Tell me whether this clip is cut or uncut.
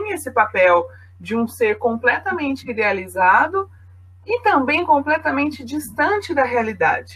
uncut